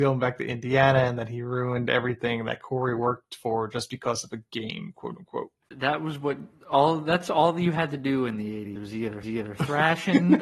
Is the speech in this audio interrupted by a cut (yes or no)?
yes